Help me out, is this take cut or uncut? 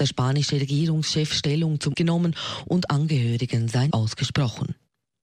cut